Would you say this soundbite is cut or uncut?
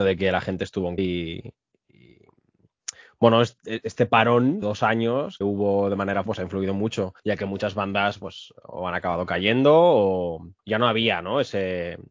cut